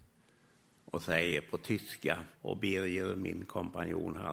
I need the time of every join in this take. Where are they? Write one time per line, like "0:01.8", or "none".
0:02.3